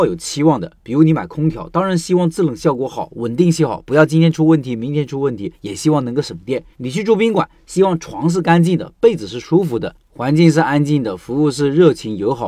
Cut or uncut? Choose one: cut